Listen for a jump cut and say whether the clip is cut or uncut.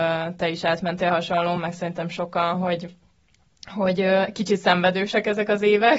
uncut